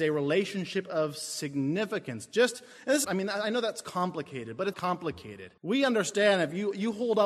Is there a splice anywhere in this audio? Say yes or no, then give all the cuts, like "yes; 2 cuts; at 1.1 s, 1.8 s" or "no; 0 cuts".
yes; 3 cuts; at 3.0 s, 4.7 s, 5.6 s